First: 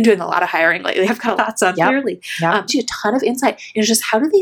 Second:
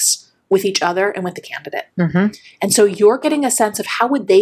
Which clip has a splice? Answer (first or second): first